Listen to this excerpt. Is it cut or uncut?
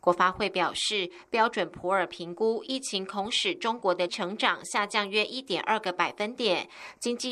cut